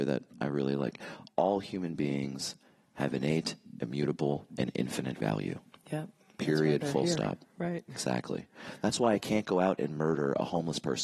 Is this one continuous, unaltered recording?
yes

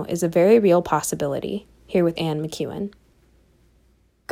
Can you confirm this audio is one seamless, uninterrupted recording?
no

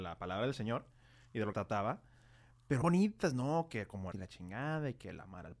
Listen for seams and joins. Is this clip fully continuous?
no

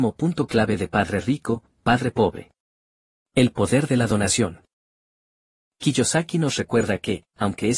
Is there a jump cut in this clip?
no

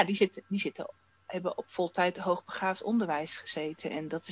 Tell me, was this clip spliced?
no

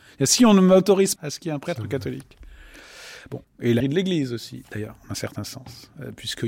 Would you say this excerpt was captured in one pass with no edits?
no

